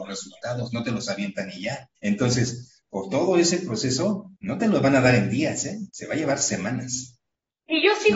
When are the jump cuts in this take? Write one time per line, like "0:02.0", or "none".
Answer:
0:02.0
0:04.4
0:05.9